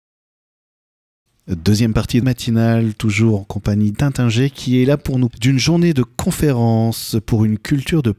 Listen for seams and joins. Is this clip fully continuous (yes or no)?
no